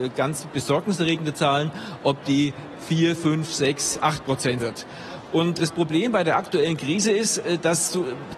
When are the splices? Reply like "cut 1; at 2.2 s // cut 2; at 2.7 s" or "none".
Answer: cut 1; at 4.6 s // cut 2; at 5.6 s